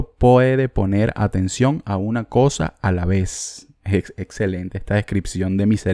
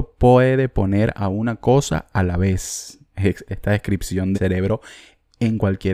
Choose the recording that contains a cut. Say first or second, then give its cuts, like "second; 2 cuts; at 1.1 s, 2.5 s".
second; 3 cuts; at 1.1 s, 3.5 s, 4.3 s